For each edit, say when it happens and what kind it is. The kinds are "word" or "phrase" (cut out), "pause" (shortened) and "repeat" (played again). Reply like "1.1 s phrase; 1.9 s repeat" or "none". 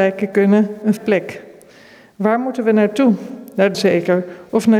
1.0 s word; 3.7 s word